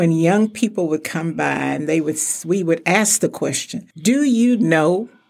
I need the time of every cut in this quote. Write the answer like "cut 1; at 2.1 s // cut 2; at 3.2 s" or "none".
cut 1; at 3.9 s

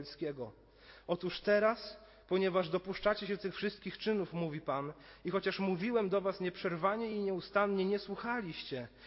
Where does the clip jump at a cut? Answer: none

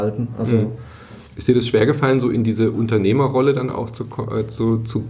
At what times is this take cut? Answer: cut 1; at 1.3 s

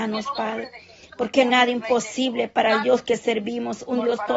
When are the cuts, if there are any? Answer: cut 1; at 1.5 s

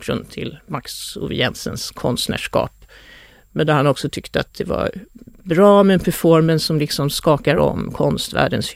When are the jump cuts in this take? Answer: none

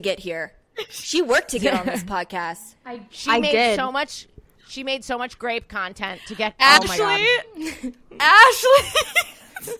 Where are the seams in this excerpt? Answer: none

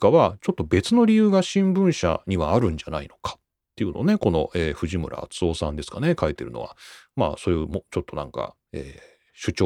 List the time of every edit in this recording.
none

